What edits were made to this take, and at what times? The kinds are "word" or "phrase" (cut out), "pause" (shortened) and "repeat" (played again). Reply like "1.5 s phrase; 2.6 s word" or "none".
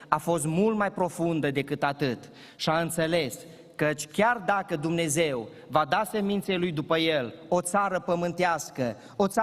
none